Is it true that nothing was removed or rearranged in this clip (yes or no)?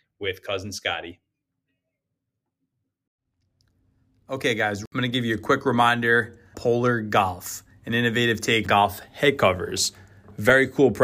no